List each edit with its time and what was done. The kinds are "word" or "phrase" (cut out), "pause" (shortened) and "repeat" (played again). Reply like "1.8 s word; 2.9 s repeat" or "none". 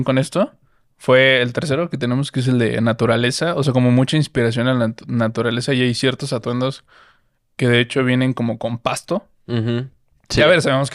none